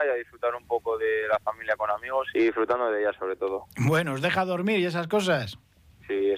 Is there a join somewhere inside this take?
yes; 1 cut; at 2.3 s

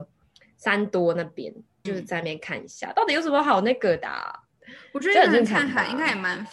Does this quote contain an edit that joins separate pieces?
yes; 1 cut; at 1.9 s

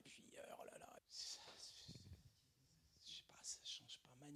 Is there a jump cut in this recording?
yes; 1 cut; at 1.0 s

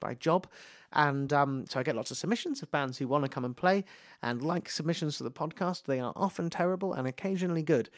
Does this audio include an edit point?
no; 0 cuts

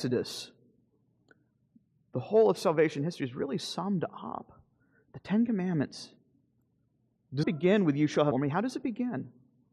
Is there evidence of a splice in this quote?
yes; 2 cuts; at 7.4 s, 8.3 s

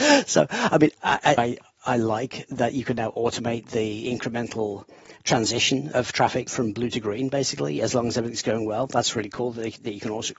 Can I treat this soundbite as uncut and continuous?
no; 2 cuts; at 1.4 s, 6.5 s

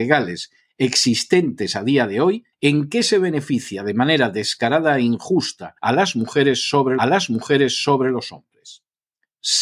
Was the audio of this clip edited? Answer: yes; 3 cuts; at 2.5 s, 5.8 s, 7.0 s

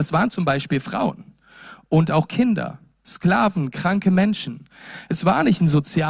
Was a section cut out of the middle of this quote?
no; 0 cuts

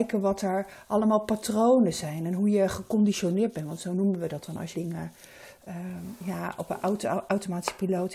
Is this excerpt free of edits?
no; 1 cut; at 4.7 s

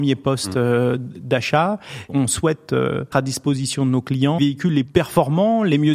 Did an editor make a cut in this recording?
yes; 4 cuts; at 2.1 s, 3.1 s, 4.4 s, 4.8 s

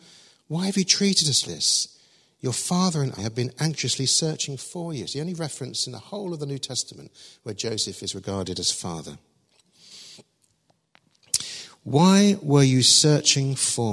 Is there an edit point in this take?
yes; 2 cuts; at 1.4 s, 3.2 s

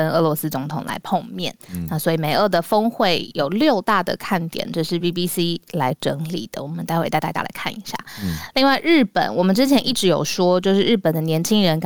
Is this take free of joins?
yes; 0 cuts

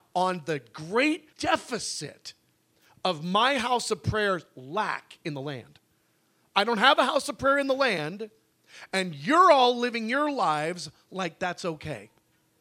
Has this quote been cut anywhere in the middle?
yes; 1 cut; at 1.3 s

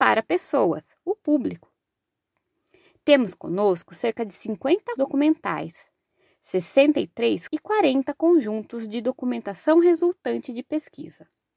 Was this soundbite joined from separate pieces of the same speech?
yes; 2 cuts; at 5.0 s, 7.5 s

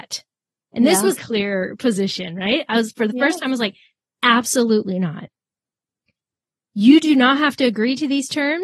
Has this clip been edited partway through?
yes; 1 cut; at 1.2 s

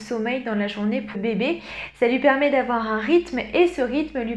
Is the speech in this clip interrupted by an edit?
yes; 1 cut; at 1.1 s

